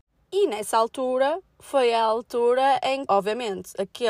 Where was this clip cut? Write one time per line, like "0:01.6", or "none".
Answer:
0:03.1

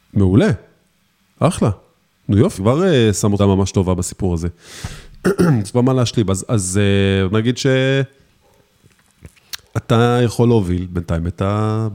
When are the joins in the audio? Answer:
0:02.6
0:03.4
0:05.7
0:07.3

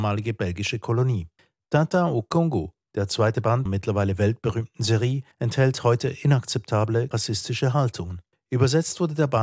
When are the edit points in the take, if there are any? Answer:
0:01.4
0:02.8
0:03.7
0:05.3
0:07.1
0:08.3

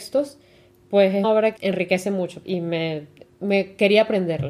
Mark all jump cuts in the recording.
0:01.2
0:01.6
0:02.4

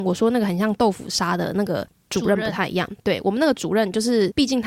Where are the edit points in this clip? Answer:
none

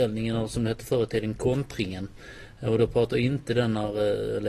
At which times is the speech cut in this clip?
none

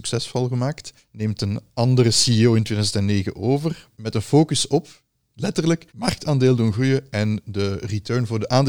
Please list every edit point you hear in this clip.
0:01.0
0:05.9

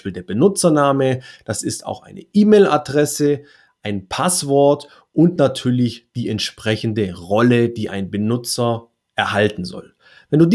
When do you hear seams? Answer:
none

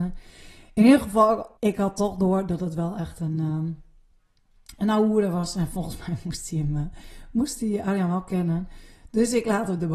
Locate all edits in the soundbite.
0:01.6

